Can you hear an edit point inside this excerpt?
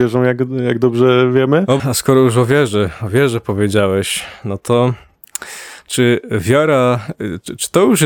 yes; 1 cut; at 1.8 s

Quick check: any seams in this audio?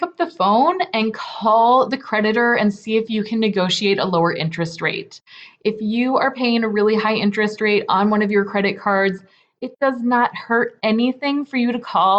no; 0 cuts

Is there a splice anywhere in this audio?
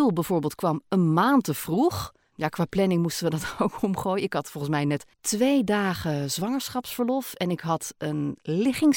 yes; 2 cuts; at 2.2 s, 5.1 s

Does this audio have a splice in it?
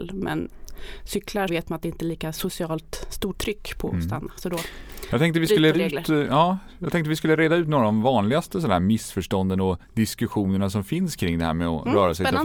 yes; 3 cuts; at 1.5 s, 3.3 s, 5.7 s

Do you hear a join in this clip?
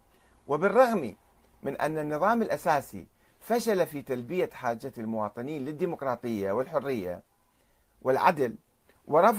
no; 0 cuts

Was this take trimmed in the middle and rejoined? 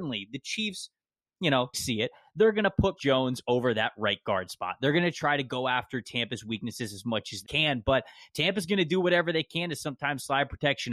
yes; 3 cuts; at 1.7 s, 3.0 s, 7.4 s

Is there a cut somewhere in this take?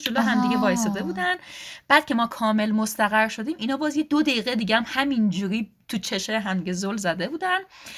no; 0 cuts

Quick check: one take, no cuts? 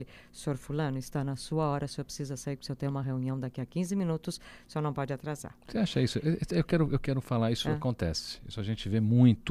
yes; 0 cuts

